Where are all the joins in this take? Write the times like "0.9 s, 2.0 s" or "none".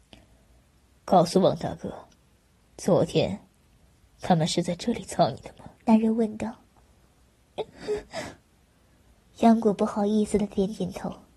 5.8 s, 6.8 s